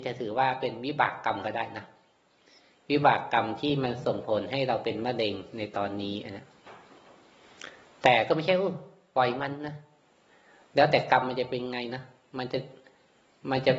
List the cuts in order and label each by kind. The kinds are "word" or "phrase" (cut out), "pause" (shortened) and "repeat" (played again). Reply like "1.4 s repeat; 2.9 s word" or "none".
none